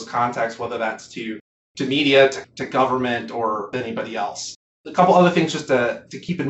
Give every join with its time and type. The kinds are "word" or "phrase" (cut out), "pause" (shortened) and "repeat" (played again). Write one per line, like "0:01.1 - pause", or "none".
0:02.4 - word

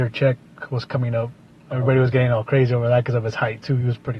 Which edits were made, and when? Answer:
none

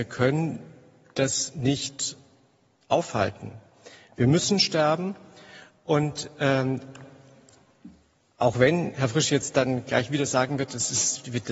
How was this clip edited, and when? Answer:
none

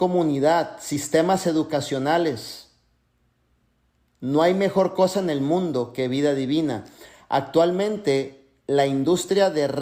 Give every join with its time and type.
none

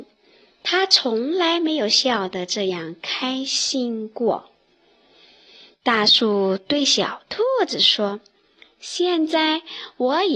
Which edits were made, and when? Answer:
none

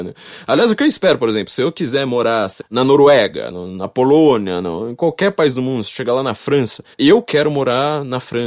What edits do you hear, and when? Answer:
0:02.6 - word
0:03.5 - word
0:06.9 - pause

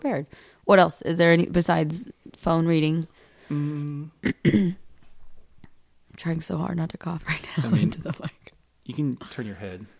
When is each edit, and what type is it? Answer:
none

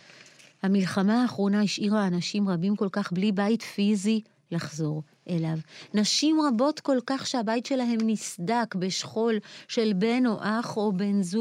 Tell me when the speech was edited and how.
none

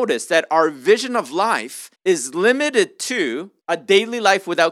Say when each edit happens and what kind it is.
0:01.9 - pause
0:03.6 - pause

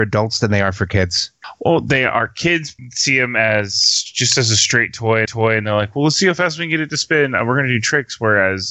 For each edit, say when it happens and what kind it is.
0:05.3 - repeat

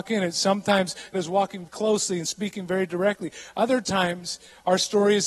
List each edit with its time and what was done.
0:01.1 - word
0:01.7 - word

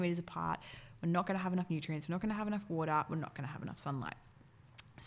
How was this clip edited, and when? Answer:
none

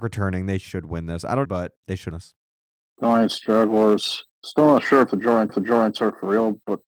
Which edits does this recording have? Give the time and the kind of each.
0:01.4 - phrase
0:02.1 - word
0:02.5 - pause
0:04.3 - pause
0:05.5 - repeat

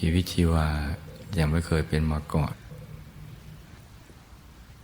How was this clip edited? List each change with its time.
none

